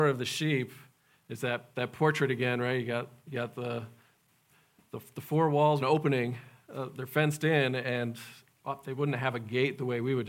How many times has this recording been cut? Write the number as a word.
one